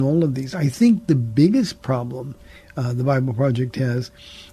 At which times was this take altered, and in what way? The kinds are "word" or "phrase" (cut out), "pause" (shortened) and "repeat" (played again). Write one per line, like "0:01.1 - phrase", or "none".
none